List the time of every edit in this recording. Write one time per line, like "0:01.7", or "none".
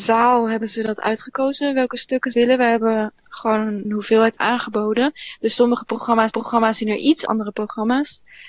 0:02.3
0:03.8
0:04.4
0:06.3
0:07.3